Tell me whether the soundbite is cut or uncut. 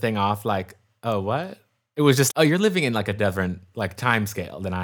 cut